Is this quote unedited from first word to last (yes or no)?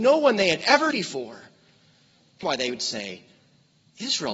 no